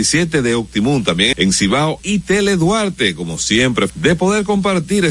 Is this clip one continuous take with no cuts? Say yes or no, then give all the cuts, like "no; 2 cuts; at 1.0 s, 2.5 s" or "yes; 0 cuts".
no; 3 cuts; at 1.3 s, 2.0 s, 3.9 s